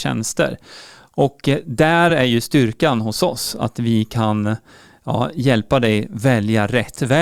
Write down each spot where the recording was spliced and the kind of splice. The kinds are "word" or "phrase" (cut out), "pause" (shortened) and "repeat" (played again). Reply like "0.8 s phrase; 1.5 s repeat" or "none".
none

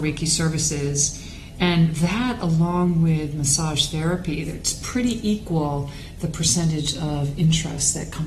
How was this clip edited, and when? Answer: none

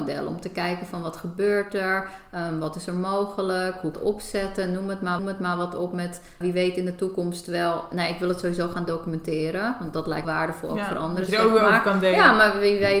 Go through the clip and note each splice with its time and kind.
3.9 s phrase; 5.2 s repeat; 6.4 s word; 10.2 s phrase

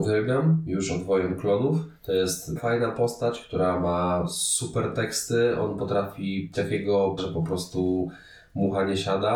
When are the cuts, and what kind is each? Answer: 2.0 s pause; 2.6 s word; 6.5 s word; 7.2 s word

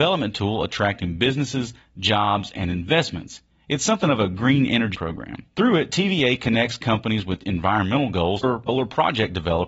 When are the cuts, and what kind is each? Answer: 3.5 s pause; 4.9 s word; 5.5 s pause

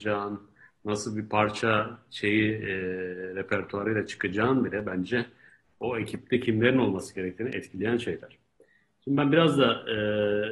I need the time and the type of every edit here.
none

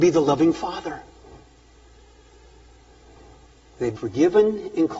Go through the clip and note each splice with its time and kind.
4.0 s word

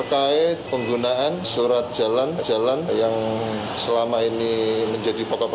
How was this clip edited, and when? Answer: 2.4 s repeat

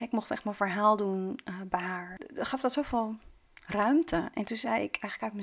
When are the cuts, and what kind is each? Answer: none

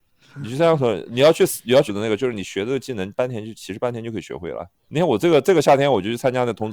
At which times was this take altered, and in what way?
1.9 s word; 4.8 s pause

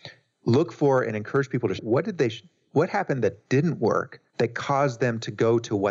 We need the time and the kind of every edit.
1.8 s word; 4.3 s pause

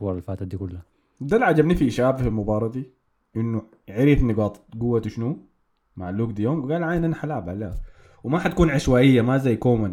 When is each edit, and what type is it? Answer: none

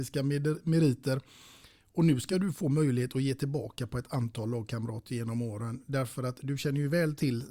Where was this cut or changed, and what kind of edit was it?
none

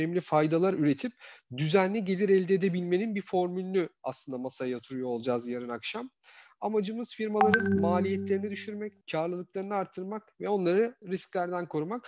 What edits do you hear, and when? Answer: 9.0 s pause; 11.0 s word

